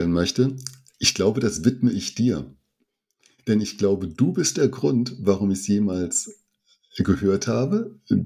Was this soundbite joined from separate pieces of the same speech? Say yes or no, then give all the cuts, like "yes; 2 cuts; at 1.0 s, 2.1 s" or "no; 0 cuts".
no; 0 cuts